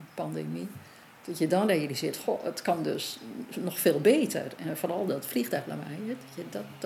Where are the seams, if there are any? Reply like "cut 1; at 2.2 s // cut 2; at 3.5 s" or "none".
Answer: none